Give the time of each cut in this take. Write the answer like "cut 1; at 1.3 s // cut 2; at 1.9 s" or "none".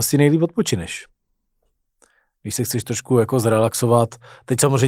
none